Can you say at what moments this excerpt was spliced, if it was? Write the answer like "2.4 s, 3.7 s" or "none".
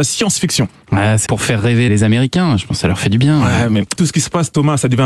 1.3 s, 1.9 s, 4.0 s